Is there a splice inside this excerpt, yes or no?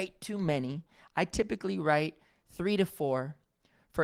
no